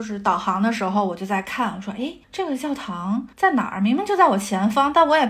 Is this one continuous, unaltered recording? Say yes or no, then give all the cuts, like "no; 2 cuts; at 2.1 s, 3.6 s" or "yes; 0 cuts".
no; 2 cuts; at 2.2 s, 3.3 s